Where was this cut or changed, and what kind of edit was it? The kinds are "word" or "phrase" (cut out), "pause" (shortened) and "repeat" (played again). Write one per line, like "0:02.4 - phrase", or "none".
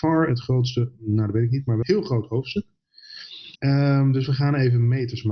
0:01.8 - word
0:03.5 - pause